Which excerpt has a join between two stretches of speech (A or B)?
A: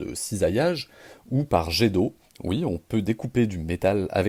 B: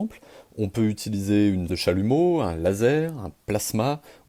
B